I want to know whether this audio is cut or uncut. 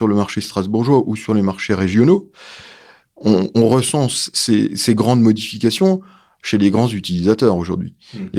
uncut